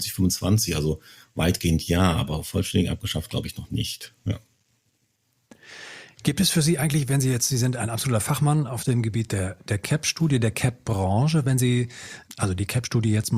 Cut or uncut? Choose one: uncut